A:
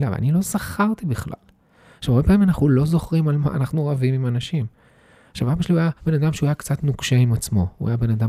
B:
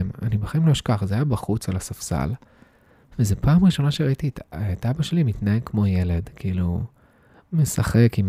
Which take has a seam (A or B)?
A